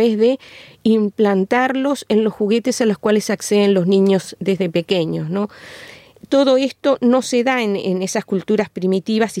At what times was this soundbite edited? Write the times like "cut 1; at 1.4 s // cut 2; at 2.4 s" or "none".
none